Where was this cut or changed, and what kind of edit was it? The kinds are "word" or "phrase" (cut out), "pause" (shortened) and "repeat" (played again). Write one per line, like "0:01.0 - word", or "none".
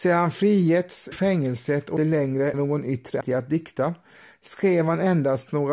0:01.1 - word
0:02.0 - word
0:02.5 - word
0:03.2 - word